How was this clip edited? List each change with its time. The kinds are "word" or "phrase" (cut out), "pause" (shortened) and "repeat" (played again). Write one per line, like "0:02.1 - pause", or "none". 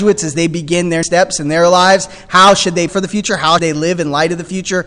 0:01.0 - word
0:02.9 - word
0:03.6 - word